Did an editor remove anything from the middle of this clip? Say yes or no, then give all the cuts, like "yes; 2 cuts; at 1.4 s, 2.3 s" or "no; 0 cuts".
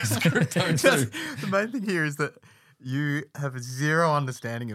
no; 0 cuts